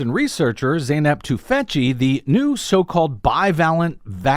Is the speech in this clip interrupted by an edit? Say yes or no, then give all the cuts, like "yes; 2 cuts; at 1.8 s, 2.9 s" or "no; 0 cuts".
no; 0 cuts